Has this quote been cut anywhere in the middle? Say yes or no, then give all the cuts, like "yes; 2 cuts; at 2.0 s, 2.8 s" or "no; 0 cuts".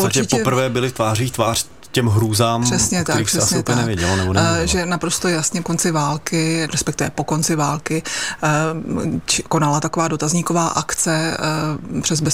yes; 2 cuts; at 5.6 s, 6.7 s